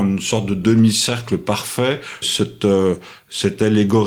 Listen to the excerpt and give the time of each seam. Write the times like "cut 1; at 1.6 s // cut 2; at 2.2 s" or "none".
cut 1; at 2.2 s